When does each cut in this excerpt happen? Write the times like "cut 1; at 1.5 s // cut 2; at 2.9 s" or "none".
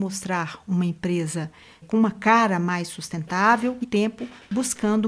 cut 1; at 1.8 s // cut 2; at 3.8 s